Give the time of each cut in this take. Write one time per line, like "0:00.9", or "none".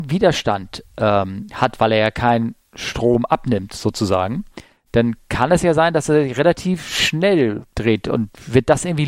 none